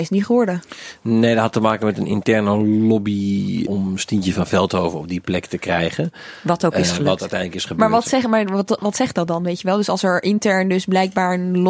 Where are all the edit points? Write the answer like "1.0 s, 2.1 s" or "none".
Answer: none